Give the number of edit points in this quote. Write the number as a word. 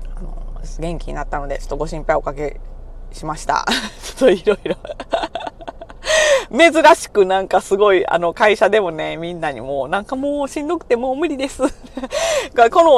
zero